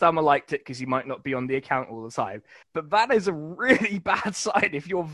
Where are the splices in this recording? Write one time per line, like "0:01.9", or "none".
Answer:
0:02.6